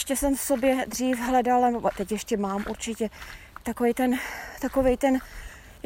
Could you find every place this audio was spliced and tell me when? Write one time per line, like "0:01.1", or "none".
0:03.6